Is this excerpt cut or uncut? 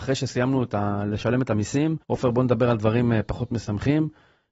cut